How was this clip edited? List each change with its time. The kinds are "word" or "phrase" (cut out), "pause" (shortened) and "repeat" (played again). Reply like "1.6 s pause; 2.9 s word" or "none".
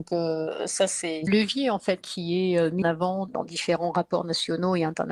1.3 s phrase; 2.0 s word; 2.8 s word; 3.3 s word